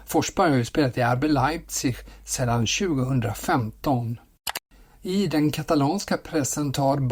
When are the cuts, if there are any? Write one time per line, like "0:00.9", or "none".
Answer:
none